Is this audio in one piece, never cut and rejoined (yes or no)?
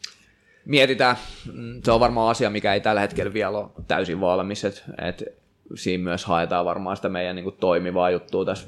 yes